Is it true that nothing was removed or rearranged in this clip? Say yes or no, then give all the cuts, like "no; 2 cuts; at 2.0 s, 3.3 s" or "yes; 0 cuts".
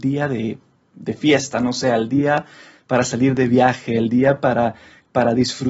yes; 0 cuts